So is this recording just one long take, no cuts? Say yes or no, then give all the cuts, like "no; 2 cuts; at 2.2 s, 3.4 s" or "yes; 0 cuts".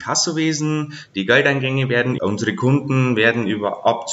no; 1 cut; at 2.2 s